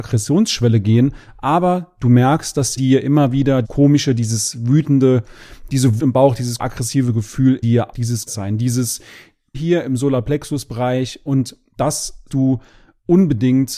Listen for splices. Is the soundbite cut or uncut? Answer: cut